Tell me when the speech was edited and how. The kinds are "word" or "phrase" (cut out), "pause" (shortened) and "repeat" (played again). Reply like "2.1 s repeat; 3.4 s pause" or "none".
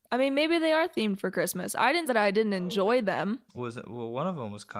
2.1 s word; 3.6 s word